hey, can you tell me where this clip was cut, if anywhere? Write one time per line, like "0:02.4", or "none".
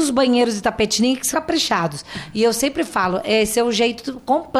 0:01.3